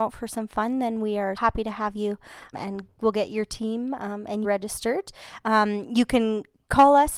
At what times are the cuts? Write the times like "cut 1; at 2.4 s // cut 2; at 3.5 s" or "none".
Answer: cut 1; at 1.4 s // cut 2; at 2.5 s // cut 3; at 4.4 s